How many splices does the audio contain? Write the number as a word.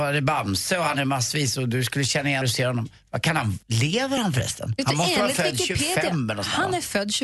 two